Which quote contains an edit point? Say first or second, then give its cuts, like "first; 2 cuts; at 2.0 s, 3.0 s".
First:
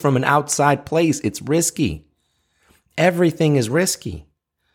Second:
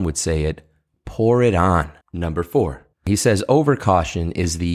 second; 2 cuts; at 2.0 s, 2.9 s